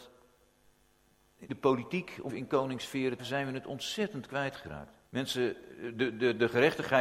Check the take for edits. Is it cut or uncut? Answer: cut